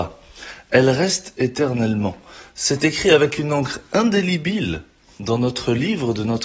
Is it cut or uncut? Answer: uncut